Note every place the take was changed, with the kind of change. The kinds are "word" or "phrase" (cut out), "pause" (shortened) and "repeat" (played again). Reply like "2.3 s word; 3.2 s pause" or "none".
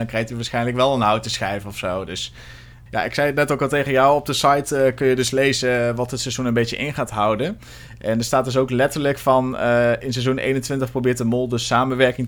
2.9 s word